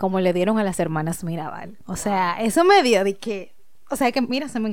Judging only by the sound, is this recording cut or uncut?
uncut